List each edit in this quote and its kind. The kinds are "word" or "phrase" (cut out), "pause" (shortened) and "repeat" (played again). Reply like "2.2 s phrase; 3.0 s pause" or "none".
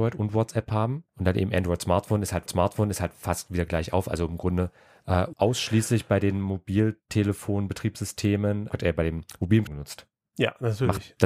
1.1 s pause; 2.5 s repeat; 5.3 s phrase; 8.7 s word; 9.7 s phrase